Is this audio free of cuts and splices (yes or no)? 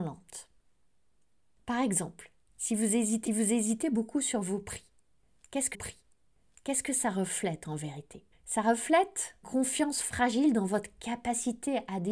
no